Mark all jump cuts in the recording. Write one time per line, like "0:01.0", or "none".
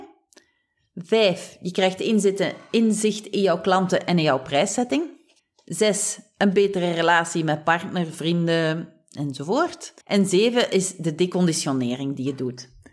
0:05.4
0:10.0